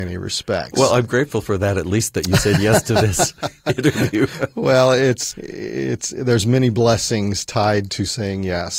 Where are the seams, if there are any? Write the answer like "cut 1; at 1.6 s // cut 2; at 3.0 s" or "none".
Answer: cut 1; at 5.3 s